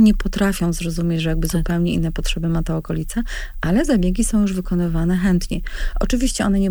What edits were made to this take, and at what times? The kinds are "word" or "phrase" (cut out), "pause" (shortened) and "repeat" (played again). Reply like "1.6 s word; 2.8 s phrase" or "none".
none